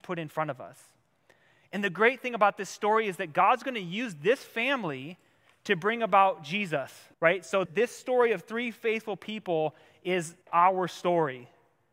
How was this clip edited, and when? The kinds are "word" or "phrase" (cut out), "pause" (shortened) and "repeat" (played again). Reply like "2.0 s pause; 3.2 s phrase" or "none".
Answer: 7.1 s pause; 7.7 s word; 10.4 s pause